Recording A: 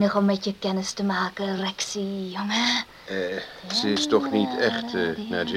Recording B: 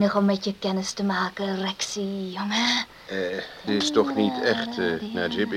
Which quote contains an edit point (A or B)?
B